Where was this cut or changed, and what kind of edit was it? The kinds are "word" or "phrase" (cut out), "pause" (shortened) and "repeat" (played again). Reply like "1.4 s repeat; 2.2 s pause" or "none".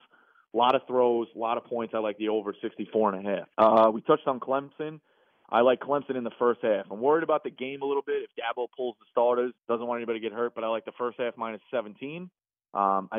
3.5 s pause; 9.6 s pause